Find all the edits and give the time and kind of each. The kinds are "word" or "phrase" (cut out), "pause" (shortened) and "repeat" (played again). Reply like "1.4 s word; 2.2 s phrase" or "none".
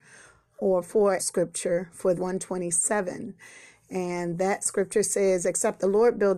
1.2 s phrase; 2.1 s phrase